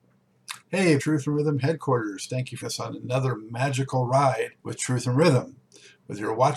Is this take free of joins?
no; 3 cuts; at 1.0 s, 2.6 s, 4.6 s

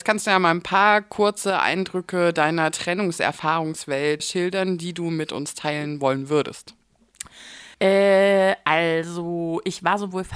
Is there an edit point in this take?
yes; 2 cuts; at 4.2 s, 7.7 s

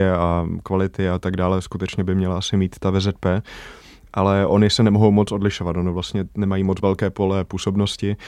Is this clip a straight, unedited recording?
yes; 0 cuts

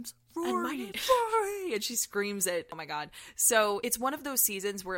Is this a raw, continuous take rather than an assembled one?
no; 1 cut; at 0.9 s

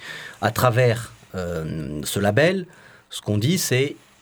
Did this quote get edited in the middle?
no; 0 cuts

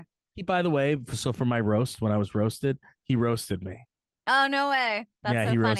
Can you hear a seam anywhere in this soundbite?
no; 0 cuts

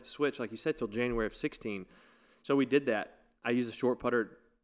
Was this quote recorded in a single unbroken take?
yes; 0 cuts

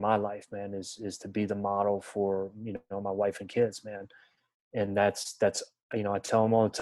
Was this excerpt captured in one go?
yes; 0 cuts

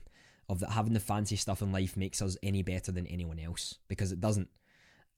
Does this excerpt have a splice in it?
no; 0 cuts

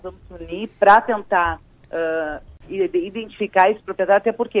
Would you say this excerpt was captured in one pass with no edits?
yes; 0 cuts

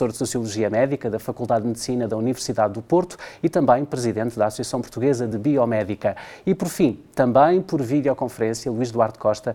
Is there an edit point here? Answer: no; 0 cuts

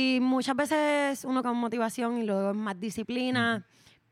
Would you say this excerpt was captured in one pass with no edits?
no; 1 cut; at 1.4 s

